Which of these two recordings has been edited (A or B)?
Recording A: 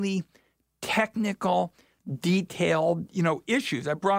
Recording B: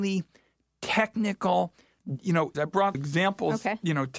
B